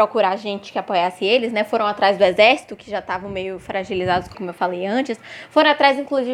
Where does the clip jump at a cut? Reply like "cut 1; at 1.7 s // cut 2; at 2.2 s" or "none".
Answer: cut 1; at 4.3 s